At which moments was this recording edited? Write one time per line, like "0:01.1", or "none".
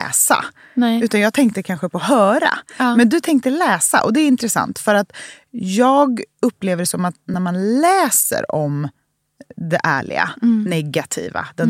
none

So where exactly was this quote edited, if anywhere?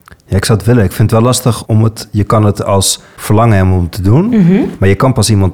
0:01.7

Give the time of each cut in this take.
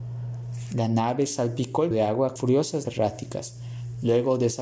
0:01.9
0:02.4
0:02.8

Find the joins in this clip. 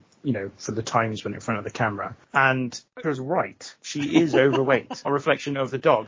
0:01.3
0:03.0
0:03.8
0:05.0

